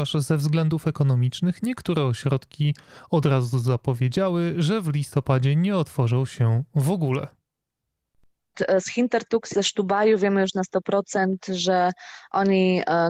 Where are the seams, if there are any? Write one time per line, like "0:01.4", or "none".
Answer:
0:09.5